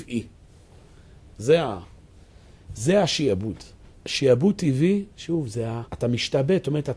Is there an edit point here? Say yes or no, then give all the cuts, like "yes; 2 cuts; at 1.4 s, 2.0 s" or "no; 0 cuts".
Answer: yes; 2 cuts; at 3.9 s, 5.9 s